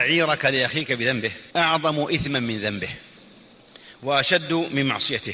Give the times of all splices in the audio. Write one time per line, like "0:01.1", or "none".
0:01.5